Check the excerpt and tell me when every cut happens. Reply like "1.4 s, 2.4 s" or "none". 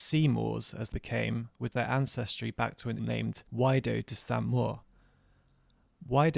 0.9 s, 1.7 s, 3.0 s, 3.5 s